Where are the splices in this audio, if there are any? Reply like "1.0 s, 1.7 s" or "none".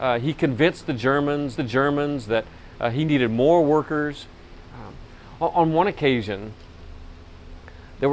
1.5 s